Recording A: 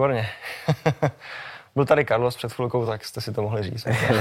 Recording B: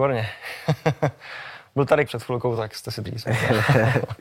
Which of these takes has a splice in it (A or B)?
B